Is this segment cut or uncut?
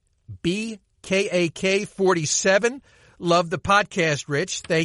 uncut